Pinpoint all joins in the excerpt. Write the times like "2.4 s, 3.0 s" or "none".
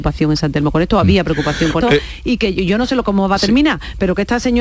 1.8 s